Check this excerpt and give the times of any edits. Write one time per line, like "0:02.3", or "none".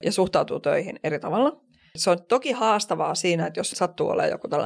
none